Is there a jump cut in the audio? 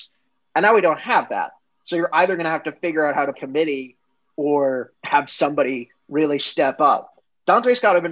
yes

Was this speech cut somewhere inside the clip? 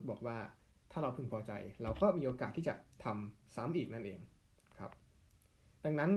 no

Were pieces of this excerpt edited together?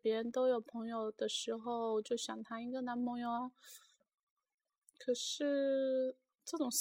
no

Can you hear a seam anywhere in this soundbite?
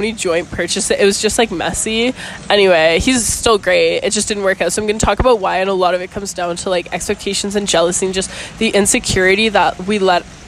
no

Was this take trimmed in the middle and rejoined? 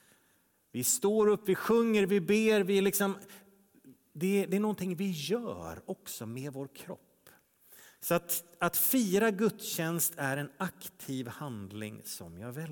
no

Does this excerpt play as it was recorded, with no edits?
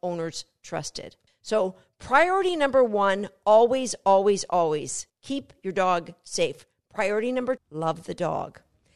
no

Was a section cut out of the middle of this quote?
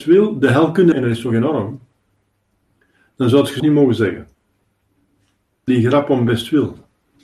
yes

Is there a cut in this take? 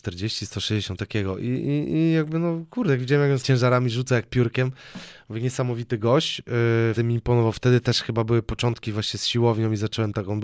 yes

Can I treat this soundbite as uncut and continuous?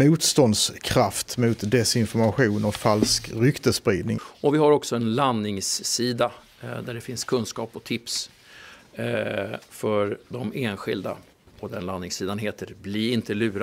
yes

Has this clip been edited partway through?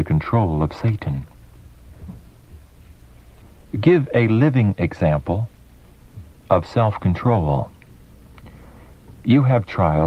no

